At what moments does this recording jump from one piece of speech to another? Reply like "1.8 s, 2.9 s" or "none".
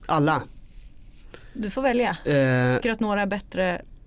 2.8 s